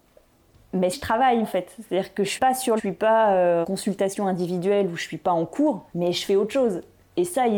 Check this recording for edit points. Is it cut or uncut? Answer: cut